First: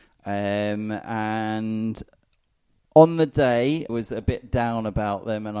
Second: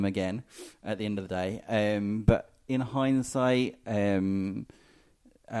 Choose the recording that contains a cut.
first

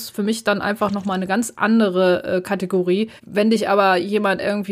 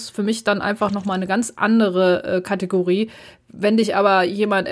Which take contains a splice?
first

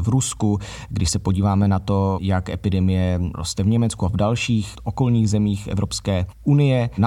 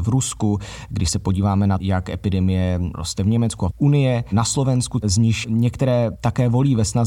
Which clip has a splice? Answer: second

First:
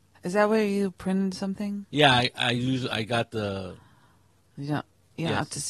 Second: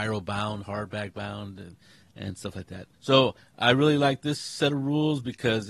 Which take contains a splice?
second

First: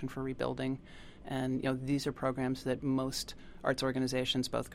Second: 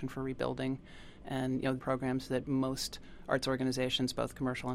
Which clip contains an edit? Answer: second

